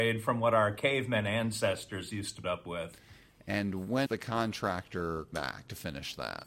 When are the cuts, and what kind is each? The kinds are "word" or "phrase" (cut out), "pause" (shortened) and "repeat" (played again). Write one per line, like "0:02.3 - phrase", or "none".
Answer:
0:02.4 - word
0:04.1 - word
0:05.3 - word

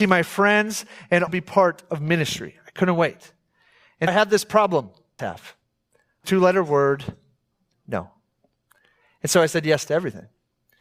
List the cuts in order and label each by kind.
0:01.3 - word
0:04.1 - word
0:05.2 - phrase
0:06.2 - phrase
0:07.5 - pause

